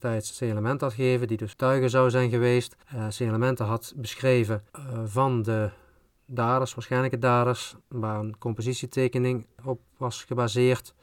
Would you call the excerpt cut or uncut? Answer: cut